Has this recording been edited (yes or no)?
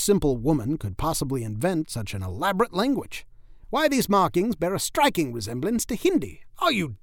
no